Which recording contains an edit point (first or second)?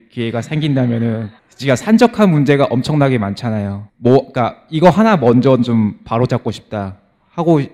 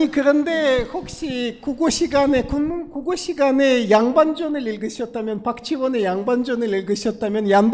first